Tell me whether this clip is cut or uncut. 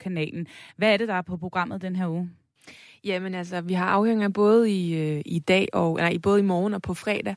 uncut